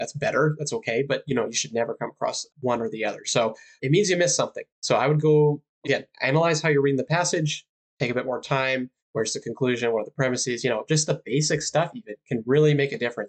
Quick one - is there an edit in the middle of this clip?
yes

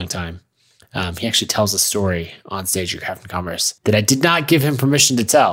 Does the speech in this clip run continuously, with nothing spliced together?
no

